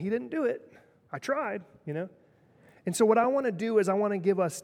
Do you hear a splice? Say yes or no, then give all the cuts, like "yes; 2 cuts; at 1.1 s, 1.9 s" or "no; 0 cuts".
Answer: no; 0 cuts